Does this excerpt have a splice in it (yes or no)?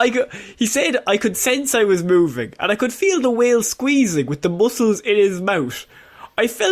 no